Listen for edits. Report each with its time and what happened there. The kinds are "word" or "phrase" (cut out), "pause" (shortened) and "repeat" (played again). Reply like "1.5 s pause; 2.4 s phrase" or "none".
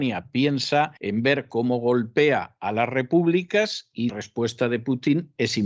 1.0 s pause; 4.1 s word